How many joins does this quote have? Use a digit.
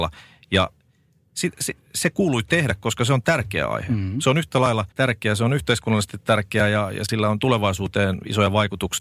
2